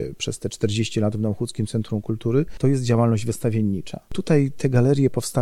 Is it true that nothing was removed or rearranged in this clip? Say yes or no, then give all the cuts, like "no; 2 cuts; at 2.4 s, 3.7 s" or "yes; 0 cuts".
yes; 0 cuts